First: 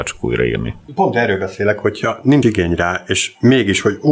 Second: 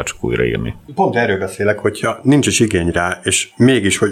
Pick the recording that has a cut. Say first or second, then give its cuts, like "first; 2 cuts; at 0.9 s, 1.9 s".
first; 1 cut; at 2.4 s